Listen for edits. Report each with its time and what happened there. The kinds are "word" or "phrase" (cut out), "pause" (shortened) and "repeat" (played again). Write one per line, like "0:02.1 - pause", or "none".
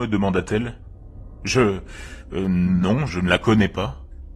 0:03.1 - word